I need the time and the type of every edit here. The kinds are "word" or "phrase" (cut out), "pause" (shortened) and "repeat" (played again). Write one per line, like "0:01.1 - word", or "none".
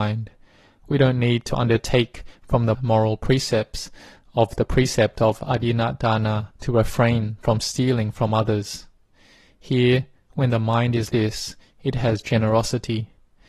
0:02.7 - phrase
0:06.5 - pause
0:11.1 - word